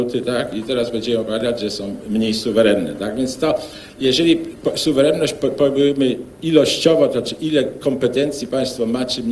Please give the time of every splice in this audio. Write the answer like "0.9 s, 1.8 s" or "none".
none